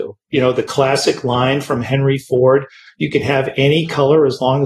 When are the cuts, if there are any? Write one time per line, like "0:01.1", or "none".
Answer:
none